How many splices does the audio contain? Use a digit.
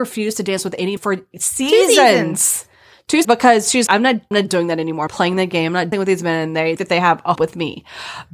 8